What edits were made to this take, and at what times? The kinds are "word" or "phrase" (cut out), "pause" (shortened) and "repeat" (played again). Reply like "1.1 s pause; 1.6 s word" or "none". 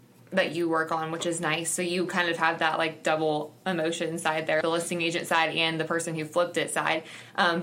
4.6 s word

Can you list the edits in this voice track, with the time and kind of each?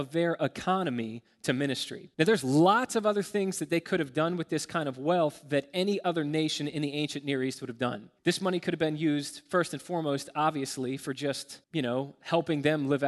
2.1 s pause; 8.2 s pause; 11.6 s pause

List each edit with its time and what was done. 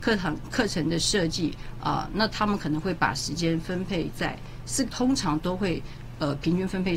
4.9 s phrase

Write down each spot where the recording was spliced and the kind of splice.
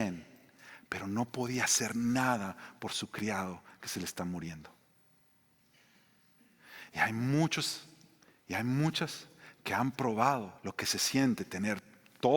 8.2 s pause; 10.6 s pause

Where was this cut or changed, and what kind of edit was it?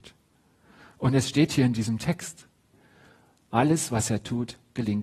none

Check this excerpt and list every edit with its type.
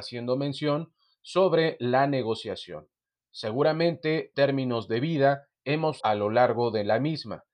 4.3 s word; 6.0 s word

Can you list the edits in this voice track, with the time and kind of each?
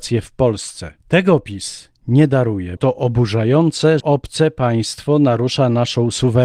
1.0 s pause; 2.8 s word; 4.0 s word

